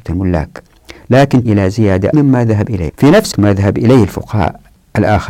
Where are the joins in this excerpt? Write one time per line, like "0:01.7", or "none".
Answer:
0:01.4
0:02.1
0:02.9
0:03.3